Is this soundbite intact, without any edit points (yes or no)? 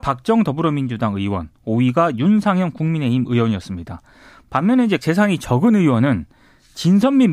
no